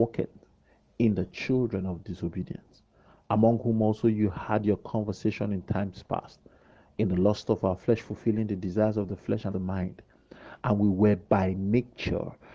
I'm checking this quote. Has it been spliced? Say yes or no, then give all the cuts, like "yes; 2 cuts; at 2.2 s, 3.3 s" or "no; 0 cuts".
yes; 1 cut; at 9.5 s